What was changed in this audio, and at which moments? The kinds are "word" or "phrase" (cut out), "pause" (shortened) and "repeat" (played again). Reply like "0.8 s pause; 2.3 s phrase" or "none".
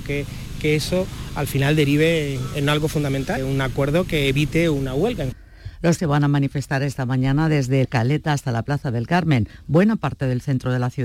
3.4 s word; 6.0 s word; 7.8 s word